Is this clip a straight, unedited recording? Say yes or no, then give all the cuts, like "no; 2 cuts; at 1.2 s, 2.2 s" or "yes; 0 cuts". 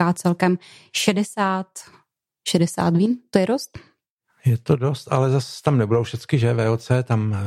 yes; 0 cuts